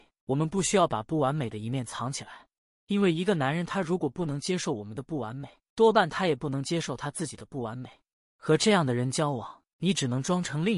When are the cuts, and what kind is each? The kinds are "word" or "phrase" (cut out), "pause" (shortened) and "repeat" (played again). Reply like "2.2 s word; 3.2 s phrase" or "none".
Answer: none